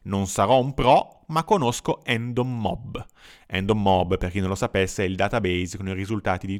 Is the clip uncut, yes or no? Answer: yes